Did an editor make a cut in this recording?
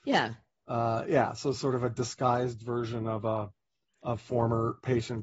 no; 0 cuts

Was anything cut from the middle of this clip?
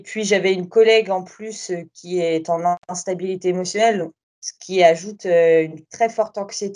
no; 0 cuts

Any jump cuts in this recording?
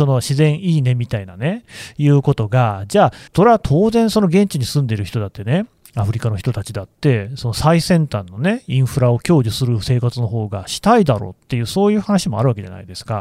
yes; 1 cut; at 3.3 s

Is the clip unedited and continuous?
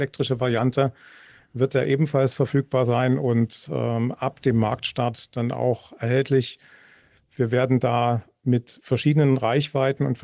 yes; 0 cuts

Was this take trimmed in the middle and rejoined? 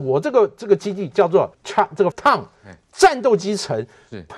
yes; 2 cuts; at 1.5 s, 2.1 s

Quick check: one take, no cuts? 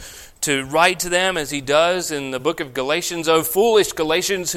yes; 0 cuts

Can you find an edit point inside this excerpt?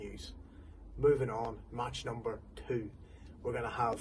no; 0 cuts

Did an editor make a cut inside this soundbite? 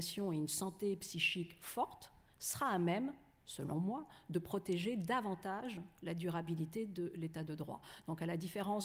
no; 0 cuts

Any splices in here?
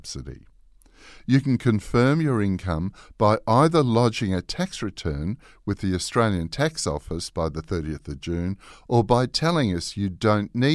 no; 0 cuts

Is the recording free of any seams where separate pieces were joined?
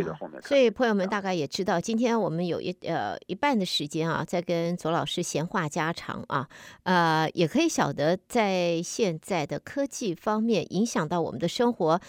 yes; 0 cuts

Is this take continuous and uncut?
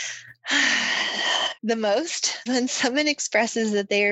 no; 2 cuts; at 1.6 s, 2.5 s

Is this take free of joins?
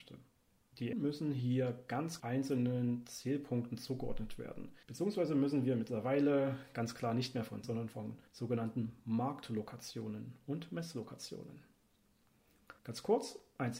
no; 6 cuts; at 0.9 s, 2.2 s, 4.8 s, 7.6 s, 8.3 s, 12.8 s

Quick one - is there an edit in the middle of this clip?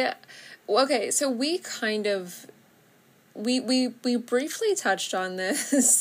no; 0 cuts

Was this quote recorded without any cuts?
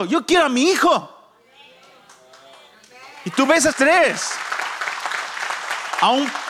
no; 1 cut; at 3.7 s

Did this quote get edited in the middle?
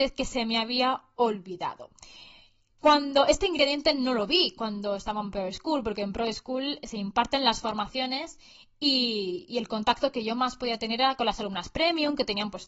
no; 0 cuts

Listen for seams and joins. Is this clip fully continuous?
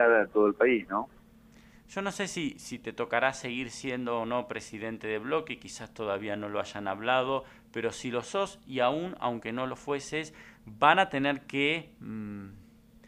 yes; 0 cuts

